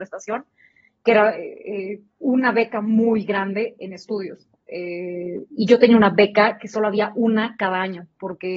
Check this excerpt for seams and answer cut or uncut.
cut